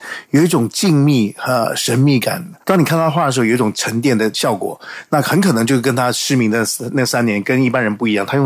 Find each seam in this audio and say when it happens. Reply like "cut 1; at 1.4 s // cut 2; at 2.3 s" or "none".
cut 1; at 2.6 s